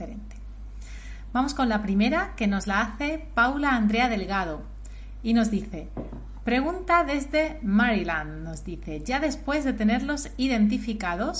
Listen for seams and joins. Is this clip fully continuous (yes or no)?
yes